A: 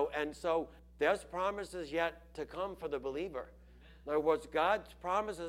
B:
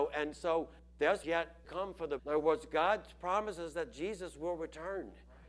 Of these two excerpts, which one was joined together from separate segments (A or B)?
B